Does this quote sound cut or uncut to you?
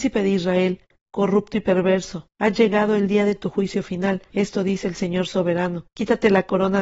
cut